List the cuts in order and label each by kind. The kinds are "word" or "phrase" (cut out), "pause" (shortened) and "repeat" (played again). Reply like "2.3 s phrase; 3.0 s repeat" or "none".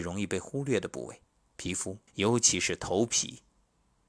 1.3 s pause; 2.1 s pause